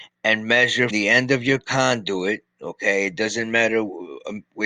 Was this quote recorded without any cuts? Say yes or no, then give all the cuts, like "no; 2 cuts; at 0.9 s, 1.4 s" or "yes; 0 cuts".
no; 1 cut; at 0.9 s